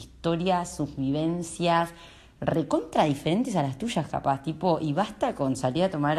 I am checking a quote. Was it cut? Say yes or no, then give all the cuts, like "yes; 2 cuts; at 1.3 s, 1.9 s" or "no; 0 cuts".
no; 0 cuts